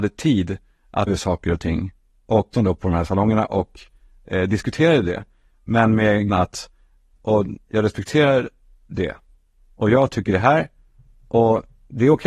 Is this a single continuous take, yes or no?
no